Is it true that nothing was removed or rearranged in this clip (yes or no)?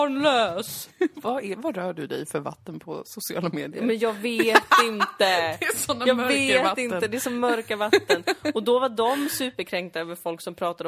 yes